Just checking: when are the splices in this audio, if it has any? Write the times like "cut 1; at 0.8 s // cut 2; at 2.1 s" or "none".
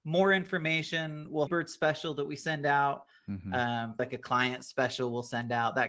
cut 1; at 1.5 s // cut 2; at 4.0 s